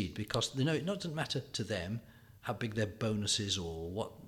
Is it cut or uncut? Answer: uncut